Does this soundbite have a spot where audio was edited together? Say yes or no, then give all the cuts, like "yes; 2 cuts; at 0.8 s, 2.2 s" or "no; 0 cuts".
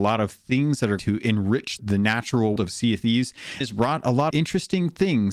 yes; 5 cuts; at 1.0 s, 1.8 s, 2.6 s, 3.6 s, 4.3 s